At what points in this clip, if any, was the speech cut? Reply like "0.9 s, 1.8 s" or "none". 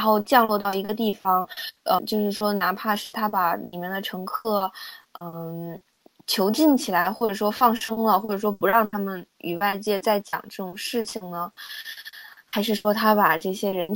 2.0 s